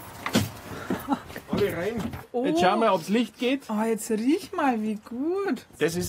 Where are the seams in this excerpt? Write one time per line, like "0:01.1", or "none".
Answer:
none